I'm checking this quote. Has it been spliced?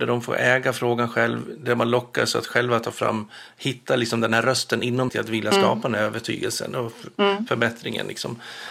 yes; 1 cut; at 5.1 s

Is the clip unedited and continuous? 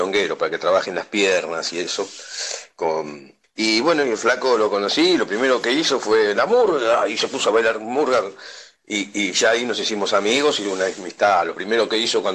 yes; 0 cuts

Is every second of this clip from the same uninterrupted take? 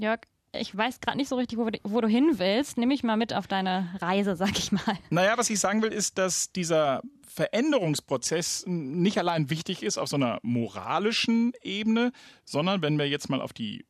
yes; 0 cuts

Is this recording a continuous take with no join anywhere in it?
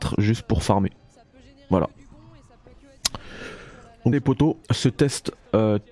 no; 2 cuts; at 4.1 s, 4.6 s

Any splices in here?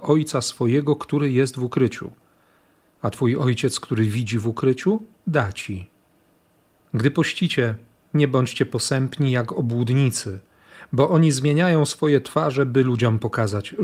no; 0 cuts

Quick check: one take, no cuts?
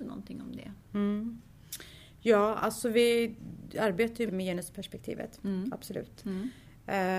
no; 1 cut; at 4.3 s

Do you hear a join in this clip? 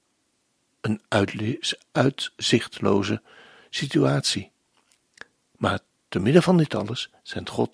no; 0 cuts

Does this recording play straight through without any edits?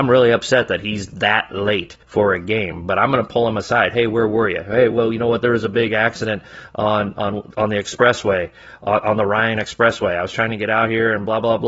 no; 1 cut; at 2.0 s

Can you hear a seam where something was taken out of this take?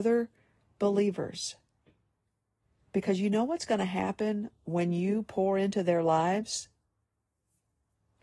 no; 0 cuts

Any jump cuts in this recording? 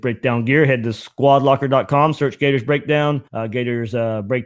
yes; 1 cut; at 3.3 s

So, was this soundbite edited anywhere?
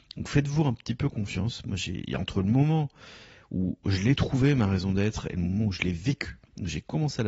no; 0 cuts

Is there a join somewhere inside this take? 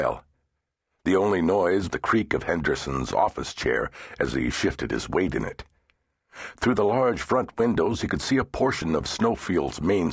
yes; 1 cut; at 1.9 s

